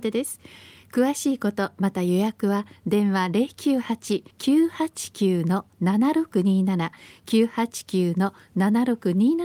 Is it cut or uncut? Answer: cut